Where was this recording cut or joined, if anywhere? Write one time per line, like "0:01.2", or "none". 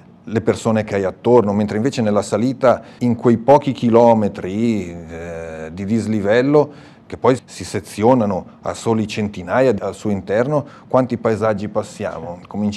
0:03.0
0:07.4
0:09.8